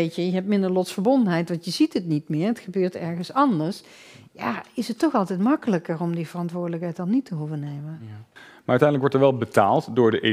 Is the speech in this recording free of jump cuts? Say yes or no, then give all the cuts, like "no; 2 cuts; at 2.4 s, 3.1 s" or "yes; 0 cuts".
no; 1 cut; at 8.4 s